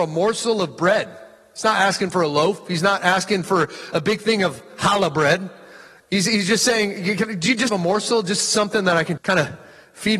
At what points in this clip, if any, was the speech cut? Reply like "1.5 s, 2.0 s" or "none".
7.7 s, 9.2 s